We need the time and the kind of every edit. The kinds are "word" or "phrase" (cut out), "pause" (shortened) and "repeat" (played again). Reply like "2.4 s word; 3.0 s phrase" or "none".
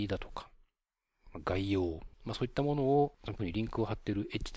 2.1 s pause; 3.4 s word